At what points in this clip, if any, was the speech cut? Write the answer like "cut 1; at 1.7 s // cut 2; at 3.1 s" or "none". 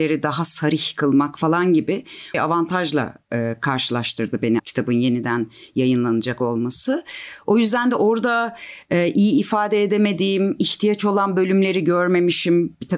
cut 1; at 2.3 s // cut 2; at 4.6 s